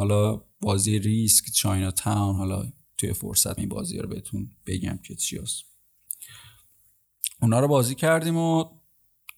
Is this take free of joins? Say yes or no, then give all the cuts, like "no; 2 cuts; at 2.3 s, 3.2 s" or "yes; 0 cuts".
no; 2 cuts; at 2.8 s, 3.6 s